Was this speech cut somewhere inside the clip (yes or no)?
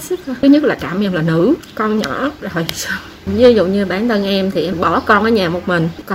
no